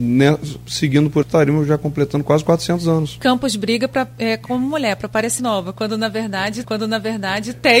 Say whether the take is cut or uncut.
cut